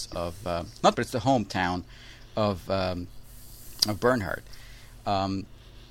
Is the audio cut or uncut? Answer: cut